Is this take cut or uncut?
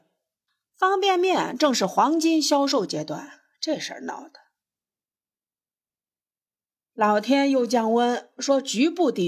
uncut